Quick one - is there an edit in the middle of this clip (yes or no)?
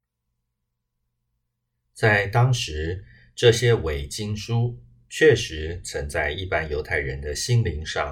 no